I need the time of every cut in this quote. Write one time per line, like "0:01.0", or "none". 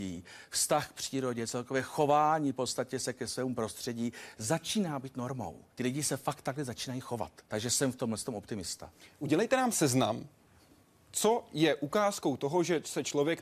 0:05.7
0:07.4